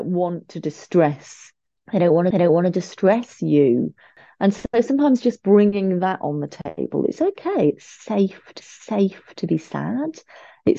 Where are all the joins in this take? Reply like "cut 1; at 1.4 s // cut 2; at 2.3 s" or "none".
cut 1; at 2.3 s // cut 2; at 8.6 s